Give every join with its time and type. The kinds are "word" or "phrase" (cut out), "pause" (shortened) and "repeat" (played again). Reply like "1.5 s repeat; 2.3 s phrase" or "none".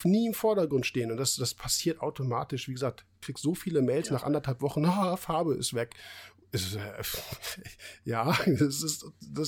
none